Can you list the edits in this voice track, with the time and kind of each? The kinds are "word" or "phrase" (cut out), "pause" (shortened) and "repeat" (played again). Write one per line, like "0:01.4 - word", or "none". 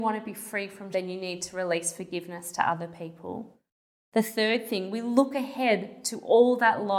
0:00.9 - word